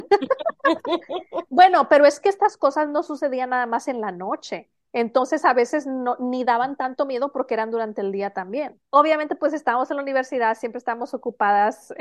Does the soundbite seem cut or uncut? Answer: cut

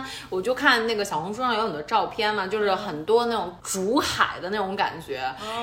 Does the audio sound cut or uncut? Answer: cut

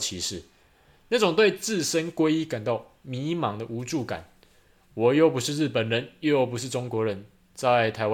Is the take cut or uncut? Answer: uncut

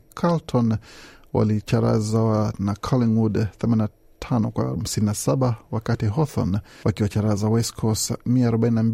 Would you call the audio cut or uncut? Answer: uncut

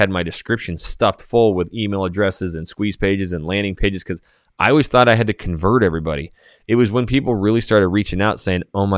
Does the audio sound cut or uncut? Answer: uncut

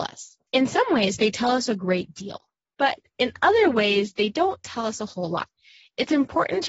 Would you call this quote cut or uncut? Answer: uncut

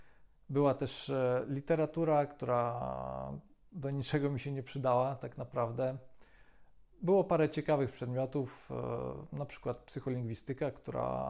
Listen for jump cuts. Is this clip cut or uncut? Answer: uncut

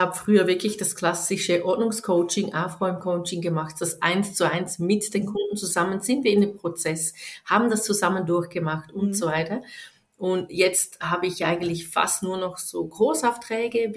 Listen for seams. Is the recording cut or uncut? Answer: uncut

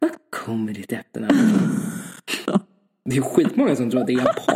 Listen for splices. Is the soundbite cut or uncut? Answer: uncut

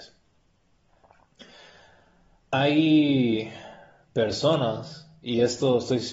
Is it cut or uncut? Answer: uncut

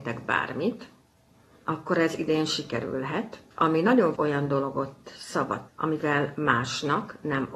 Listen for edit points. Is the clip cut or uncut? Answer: cut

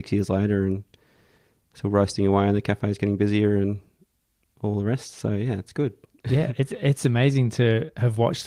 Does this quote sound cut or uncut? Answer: uncut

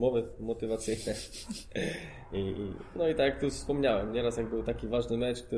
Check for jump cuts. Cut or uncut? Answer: uncut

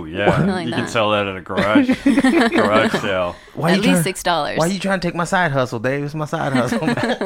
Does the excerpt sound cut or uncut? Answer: uncut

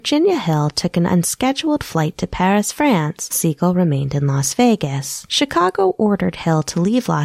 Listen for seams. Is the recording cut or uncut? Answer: cut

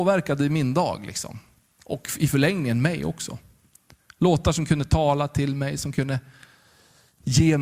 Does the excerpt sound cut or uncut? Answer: uncut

